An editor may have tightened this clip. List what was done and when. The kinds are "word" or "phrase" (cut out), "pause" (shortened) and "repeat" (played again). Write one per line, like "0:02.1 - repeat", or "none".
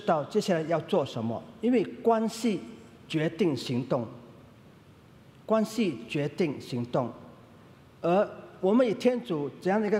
none